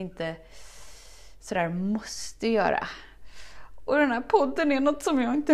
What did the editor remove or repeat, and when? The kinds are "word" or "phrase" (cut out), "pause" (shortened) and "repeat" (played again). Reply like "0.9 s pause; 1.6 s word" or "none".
none